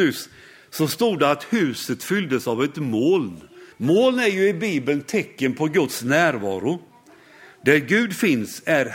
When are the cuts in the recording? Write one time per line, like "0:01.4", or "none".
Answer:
0:03.7